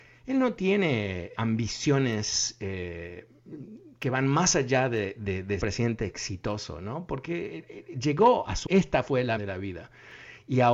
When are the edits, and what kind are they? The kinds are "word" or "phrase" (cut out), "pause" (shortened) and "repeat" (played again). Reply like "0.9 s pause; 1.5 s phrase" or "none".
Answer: 1.4 s word; 5.6 s phrase; 8.7 s word; 9.4 s word